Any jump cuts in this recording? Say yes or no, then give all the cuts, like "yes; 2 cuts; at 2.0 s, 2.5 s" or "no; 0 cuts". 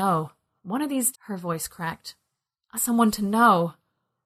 yes; 2 cuts; at 1.1 s, 2.8 s